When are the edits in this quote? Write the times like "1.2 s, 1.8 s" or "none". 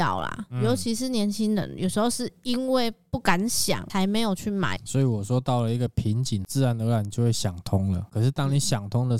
none